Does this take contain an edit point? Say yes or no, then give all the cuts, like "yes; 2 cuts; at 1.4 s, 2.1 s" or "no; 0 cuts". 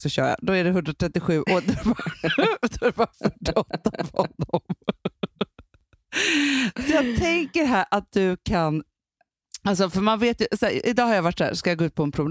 no; 0 cuts